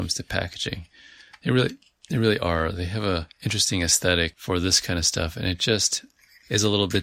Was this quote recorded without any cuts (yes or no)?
yes